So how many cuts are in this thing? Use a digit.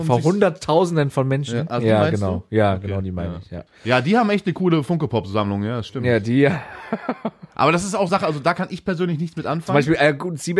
2